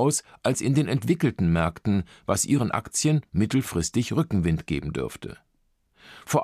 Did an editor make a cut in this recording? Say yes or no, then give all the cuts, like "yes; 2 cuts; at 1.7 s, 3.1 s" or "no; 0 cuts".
no; 0 cuts